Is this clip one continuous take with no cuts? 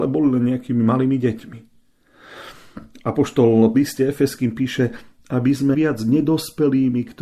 no; 2 cuts; at 3.7 s, 5.7 s

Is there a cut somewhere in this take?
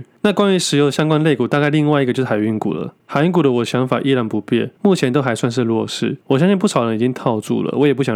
yes; 3 cuts; at 3.0 s, 4.8 s, 6.2 s

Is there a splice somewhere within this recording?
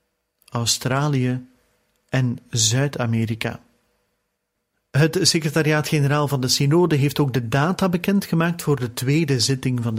no; 0 cuts

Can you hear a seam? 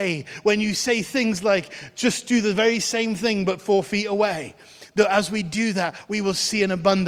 no; 0 cuts

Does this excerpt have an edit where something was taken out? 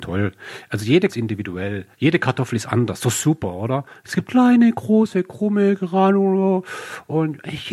yes; 2 cuts; at 1.1 s, 1.9 s

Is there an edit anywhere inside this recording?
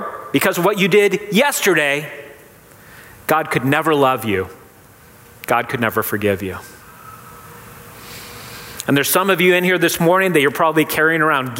no; 0 cuts

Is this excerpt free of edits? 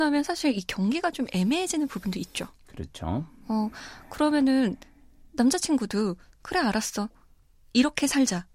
yes; 0 cuts

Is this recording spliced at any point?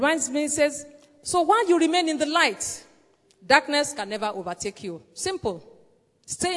no; 0 cuts

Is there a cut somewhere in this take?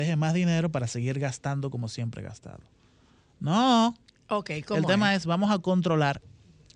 no; 0 cuts

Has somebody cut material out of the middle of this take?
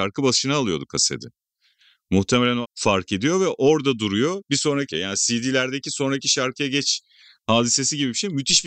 yes; 2 cuts; at 2.6 s, 4.9 s

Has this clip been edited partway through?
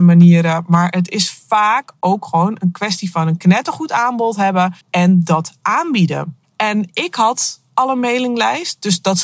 yes; 2 cuts; at 4.8 s, 6.4 s

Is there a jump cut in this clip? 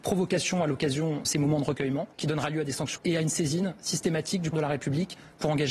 yes; 4 cuts; at 1.2 s, 2.1 s, 3.0 s, 4.5 s

